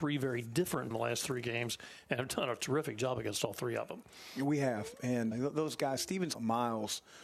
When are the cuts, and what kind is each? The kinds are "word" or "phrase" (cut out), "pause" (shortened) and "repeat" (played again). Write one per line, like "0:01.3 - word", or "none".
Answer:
0:00.9 - phrase
0:05.3 - word
0:06.3 - word

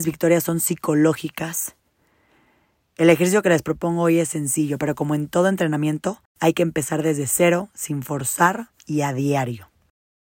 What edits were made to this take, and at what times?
0:06.3 - pause
0:08.8 - pause

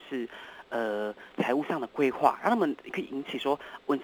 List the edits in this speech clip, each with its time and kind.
0:01.3 - pause

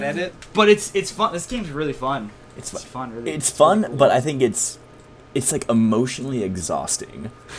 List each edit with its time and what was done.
0:02.9 - word

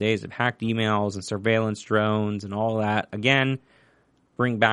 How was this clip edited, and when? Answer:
none

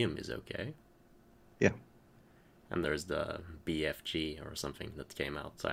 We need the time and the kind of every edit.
0:02.8 - word

